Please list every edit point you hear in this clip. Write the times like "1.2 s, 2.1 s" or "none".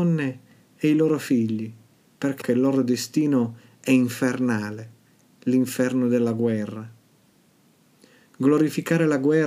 2.4 s